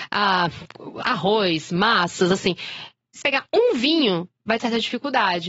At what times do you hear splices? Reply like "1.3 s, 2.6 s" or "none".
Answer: 3.2 s, 4.6 s